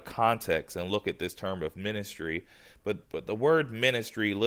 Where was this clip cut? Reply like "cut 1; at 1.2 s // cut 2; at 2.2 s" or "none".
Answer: cut 1; at 3.0 s